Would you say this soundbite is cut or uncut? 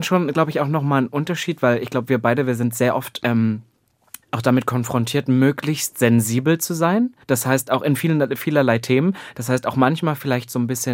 cut